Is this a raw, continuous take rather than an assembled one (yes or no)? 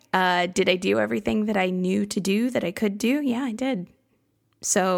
yes